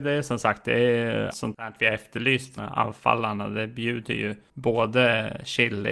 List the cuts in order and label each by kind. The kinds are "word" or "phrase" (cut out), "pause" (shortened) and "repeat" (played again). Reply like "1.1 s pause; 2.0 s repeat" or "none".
1.3 s word; 2.6 s word